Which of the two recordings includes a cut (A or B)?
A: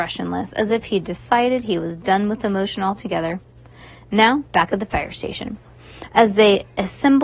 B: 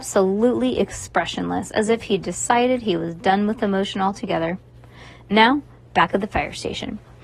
A